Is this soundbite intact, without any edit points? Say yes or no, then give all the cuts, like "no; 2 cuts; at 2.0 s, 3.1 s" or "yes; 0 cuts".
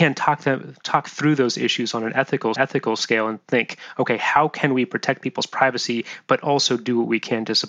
no; 1 cut; at 2.6 s